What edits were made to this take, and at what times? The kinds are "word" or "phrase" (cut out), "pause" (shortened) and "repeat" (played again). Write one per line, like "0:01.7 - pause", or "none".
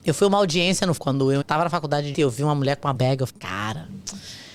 0:01.0 - word
0:01.4 - word
0:02.1 - word
0:02.9 - word
0:03.3 - word